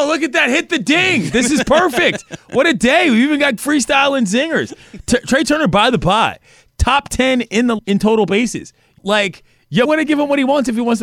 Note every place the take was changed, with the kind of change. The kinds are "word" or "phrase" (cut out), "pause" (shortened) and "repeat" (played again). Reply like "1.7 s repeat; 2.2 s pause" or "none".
3.6 s word; 7.8 s word; 9.0 s word; 9.9 s word

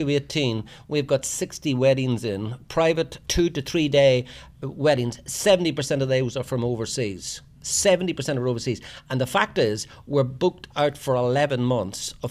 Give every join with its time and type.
3.2 s word

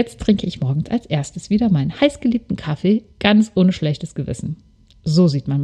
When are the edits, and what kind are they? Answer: 3.1 s pause

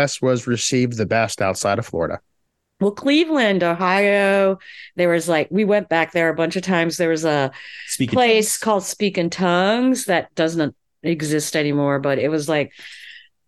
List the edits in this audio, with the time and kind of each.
none

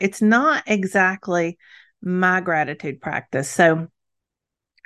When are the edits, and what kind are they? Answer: none

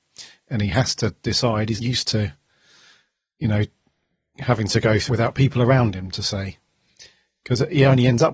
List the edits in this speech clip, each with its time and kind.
1.8 s word; 5.1 s word

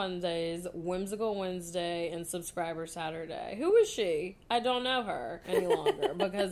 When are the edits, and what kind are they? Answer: none

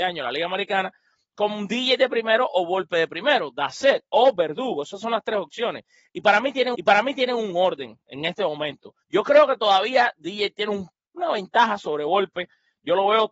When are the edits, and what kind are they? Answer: 6.7 s repeat; 9.0 s pause

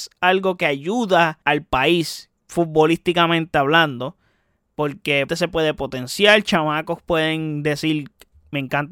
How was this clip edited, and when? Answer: 1.4 s pause; 2.4 s pause; 5.3 s phrase

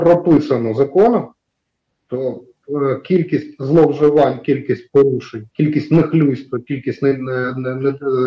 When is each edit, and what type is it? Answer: 5.5 s pause

